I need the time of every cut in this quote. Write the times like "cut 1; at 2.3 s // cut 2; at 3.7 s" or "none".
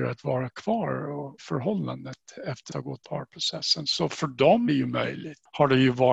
cut 1; at 1.4 s // cut 2; at 2.7 s // cut 3; at 3.0 s // cut 4; at 4.7 s